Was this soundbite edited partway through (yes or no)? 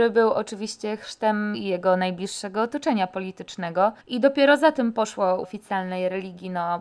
yes